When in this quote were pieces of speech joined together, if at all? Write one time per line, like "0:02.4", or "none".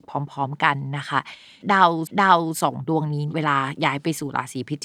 0:02.1